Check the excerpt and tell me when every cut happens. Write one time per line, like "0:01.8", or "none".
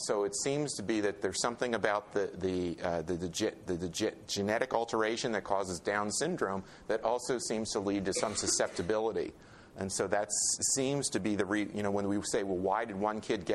0:03.7